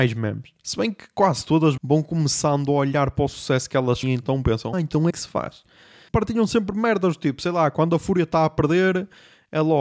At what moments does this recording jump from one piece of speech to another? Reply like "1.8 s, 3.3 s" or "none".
1.8 s, 4.0 s, 4.7 s, 5.1 s